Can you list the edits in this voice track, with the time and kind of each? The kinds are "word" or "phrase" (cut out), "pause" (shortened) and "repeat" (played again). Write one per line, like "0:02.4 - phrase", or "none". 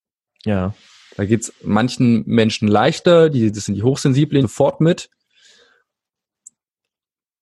0:04.4 - phrase